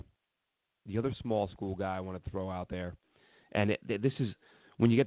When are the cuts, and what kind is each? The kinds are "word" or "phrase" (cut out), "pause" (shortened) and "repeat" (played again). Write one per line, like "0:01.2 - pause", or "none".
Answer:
none

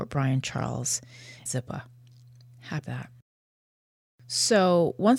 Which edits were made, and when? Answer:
0:01.5 - word
0:02.8 - phrase

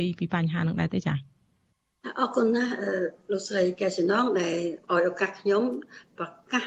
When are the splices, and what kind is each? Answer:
0:04.8 - pause

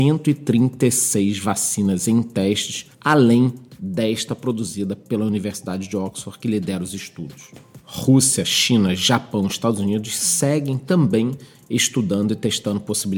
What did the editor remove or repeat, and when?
0:02.9 - pause

